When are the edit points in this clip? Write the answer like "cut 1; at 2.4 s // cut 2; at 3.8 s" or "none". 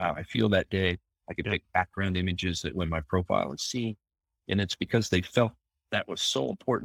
none

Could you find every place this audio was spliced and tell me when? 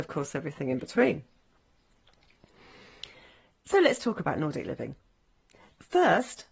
none

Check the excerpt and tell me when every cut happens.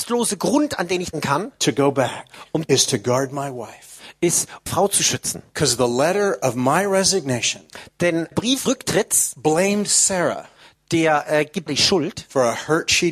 cut 1; at 1.1 s // cut 2; at 2.6 s // cut 3; at 4.7 s // cut 4; at 8.3 s // cut 5; at 8.7 s // cut 6; at 11.7 s

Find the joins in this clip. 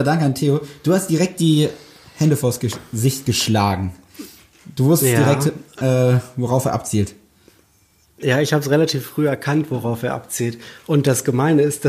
none

